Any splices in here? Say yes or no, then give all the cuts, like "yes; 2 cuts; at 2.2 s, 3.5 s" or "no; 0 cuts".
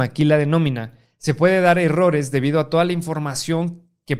no; 0 cuts